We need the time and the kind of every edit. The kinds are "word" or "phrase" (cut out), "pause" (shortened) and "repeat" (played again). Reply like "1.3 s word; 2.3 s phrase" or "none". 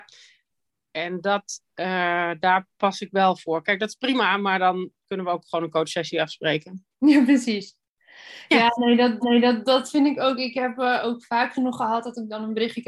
2.7 s pause; 9.2 s repeat